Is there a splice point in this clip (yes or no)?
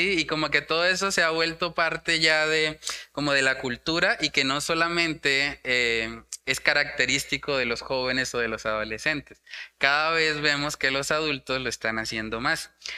no